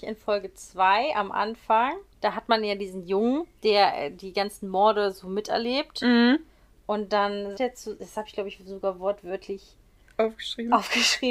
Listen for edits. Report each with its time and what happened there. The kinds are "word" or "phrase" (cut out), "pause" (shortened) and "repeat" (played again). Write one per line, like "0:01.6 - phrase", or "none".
0:02.1 - pause
0:03.6 - pause
0:07.5 - word